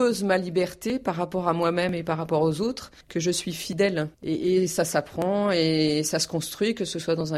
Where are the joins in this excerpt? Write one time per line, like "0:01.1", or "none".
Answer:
0:03.0
0:04.1